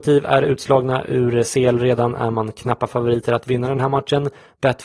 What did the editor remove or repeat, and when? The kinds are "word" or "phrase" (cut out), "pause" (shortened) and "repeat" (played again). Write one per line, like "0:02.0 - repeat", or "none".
none